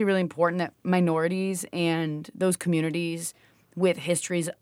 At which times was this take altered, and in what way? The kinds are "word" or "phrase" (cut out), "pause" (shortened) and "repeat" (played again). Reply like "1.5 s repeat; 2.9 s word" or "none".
none